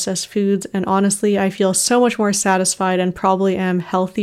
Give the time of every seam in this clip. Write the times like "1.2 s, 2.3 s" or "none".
none